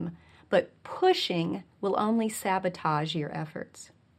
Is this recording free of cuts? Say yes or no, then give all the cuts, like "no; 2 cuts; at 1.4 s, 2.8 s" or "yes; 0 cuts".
no; 1 cut; at 1.7 s